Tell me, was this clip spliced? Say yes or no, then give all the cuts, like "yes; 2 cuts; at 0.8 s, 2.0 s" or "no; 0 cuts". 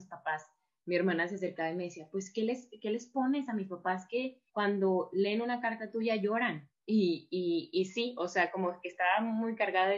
yes; 2 cuts; at 4.5 s, 6.8 s